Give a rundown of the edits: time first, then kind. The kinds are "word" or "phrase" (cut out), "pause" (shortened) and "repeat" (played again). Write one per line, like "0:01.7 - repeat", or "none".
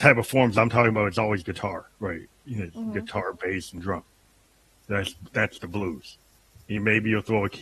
none